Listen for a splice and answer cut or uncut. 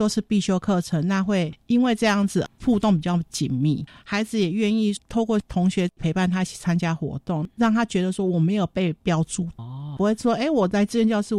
uncut